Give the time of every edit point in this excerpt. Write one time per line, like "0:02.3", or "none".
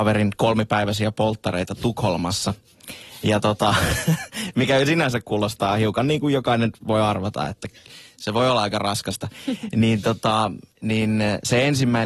0:10.7